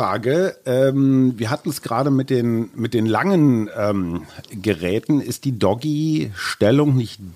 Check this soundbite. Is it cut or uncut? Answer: uncut